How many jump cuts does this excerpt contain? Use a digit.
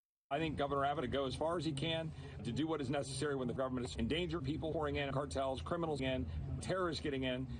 9